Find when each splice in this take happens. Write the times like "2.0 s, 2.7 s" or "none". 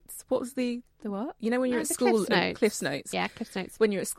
none